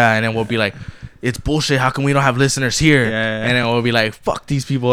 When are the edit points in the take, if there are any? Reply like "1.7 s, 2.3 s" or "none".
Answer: none

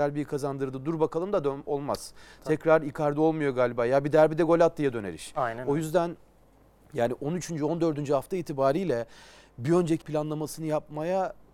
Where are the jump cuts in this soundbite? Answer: 10.0 s

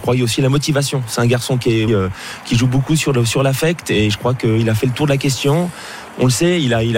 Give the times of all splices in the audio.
1.9 s

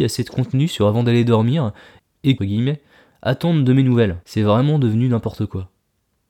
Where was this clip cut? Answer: 2.4 s, 4.2 s

